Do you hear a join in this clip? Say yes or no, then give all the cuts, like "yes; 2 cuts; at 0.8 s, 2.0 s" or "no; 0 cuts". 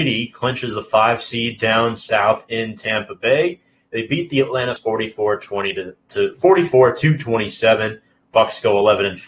yes; 2 cuts; at 4.8 s, 6.0 s